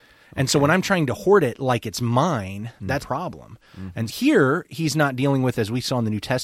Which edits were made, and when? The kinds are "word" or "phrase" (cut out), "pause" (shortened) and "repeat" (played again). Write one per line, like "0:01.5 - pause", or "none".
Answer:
0:03.0 - phrase
0:04.1 - word

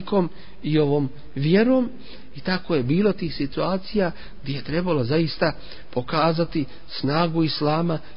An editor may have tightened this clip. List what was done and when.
none

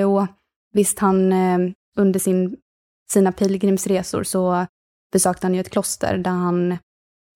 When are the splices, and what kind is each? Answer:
none

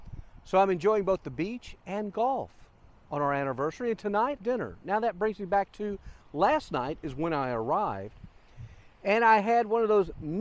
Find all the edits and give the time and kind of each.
0:04.4 - phrase

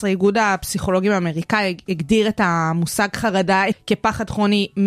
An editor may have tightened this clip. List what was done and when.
0:03.7 - word

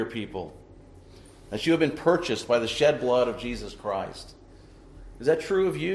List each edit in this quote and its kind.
none

